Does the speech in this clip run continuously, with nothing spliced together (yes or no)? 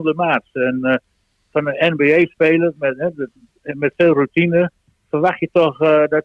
yes